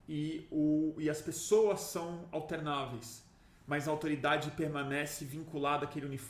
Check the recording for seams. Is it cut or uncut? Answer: uncut